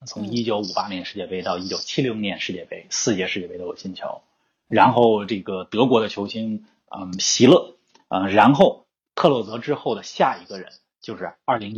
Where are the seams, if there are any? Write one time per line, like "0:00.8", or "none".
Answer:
none